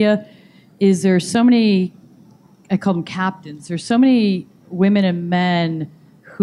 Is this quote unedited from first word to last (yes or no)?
yes